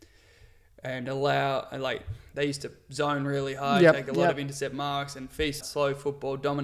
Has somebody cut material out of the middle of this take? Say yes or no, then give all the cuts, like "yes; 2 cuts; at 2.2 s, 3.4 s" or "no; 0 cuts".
yes; 1 cut; at 5.6 s